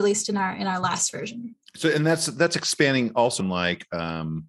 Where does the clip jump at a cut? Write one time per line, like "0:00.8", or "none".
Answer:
0:03.4